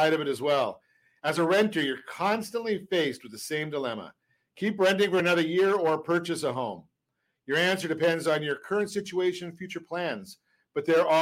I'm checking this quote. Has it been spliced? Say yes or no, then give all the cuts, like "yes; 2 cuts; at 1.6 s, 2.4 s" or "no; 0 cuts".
no; 0 cuts